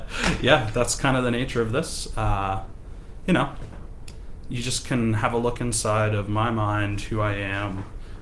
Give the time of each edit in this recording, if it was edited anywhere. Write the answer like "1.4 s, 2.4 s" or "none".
none